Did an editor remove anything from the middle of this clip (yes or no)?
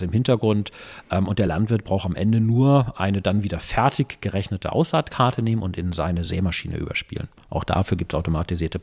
no